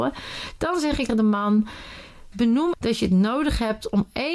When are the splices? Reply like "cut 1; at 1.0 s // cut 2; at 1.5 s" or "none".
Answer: cut 1; at 1.1 s // cut 2; at 2.3 s // cut 3; at 2.7 s